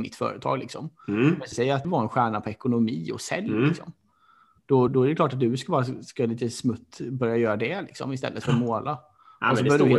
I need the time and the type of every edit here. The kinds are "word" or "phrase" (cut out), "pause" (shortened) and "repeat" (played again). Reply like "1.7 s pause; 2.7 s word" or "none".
1.5 s word; 1.8 s word; 4.9 s word